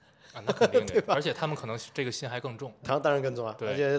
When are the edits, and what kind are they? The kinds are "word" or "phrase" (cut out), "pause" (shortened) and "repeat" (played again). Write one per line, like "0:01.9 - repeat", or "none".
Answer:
0:02.8 - word

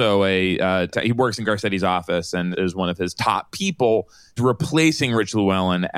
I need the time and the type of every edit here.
0:00.9 - word
0:02.5 - word
0:04.4 - word

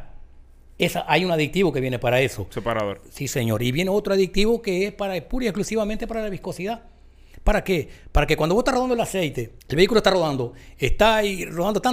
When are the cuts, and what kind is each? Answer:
0:09.6 - pause

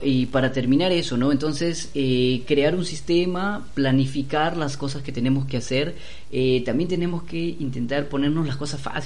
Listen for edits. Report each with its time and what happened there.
none

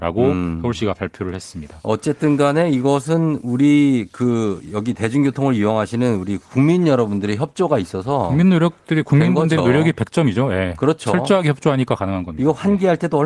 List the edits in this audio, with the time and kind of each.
none

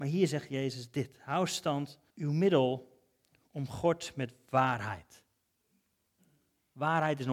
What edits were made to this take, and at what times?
0:02.1 - pause

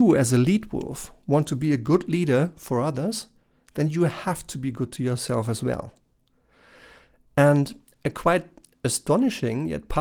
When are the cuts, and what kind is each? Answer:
none

